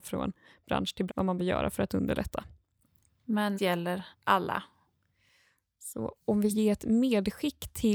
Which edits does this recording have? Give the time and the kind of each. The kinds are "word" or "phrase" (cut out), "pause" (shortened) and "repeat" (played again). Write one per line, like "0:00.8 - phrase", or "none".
0:01.1 - word
0:01.4 - word
0:03.5 - word
0:04.1 - pause
0:06.5 - word